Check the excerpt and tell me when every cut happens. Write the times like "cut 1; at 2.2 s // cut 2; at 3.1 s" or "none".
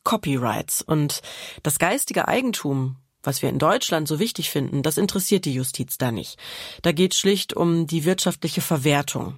none